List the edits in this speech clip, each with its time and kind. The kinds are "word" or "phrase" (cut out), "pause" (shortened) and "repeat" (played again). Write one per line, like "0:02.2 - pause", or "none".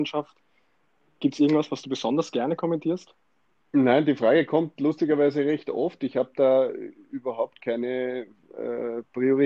none